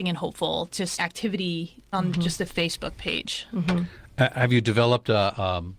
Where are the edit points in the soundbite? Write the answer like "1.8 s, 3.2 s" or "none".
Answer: 1.0 s, 1.9 s